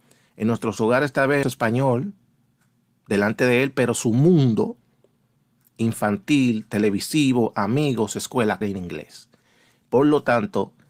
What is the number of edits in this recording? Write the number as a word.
two